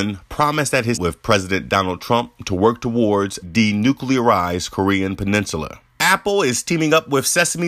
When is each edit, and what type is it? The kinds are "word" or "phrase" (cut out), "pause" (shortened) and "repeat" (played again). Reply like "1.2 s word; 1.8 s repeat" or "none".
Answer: 0.9 s word; 3.4 s word; 5.9 s pause